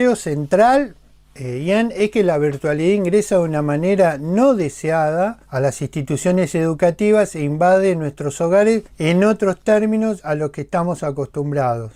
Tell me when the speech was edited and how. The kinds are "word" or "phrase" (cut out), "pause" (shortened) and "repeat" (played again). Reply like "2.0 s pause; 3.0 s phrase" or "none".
1.2 s pause; 5.4 s pause; 8.9 s pause

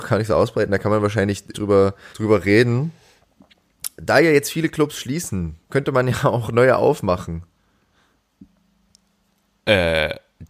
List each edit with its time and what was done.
1.5 s word; 2.1 s pause; 5.6 s pause

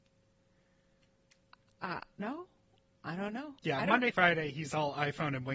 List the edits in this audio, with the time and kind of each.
2.2 s phrase; 3.6 s pause; 4.1 s word

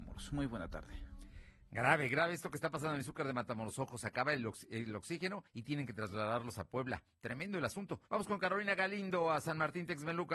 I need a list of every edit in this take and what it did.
5.5 s pause; 8.1 s pause

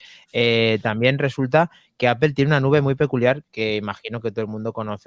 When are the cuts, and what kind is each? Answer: none

